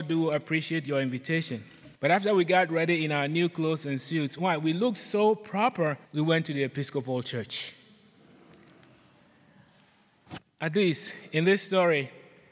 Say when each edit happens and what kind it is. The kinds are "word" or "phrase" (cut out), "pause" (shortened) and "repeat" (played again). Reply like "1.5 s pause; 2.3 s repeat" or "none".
2.0 s pause; 6.0 s pause